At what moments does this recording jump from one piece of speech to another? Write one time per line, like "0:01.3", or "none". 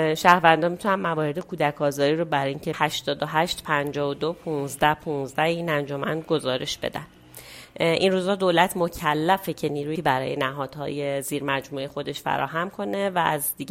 0:02.7
0:10.0